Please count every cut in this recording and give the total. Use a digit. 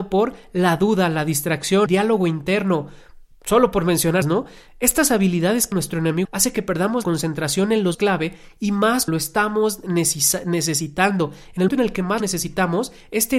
9